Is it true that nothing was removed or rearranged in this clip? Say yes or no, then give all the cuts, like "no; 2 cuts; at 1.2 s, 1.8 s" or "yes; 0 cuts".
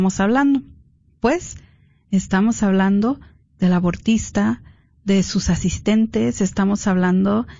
yes; 0 cuts